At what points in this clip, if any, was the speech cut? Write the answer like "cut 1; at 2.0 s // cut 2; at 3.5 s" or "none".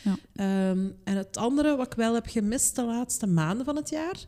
none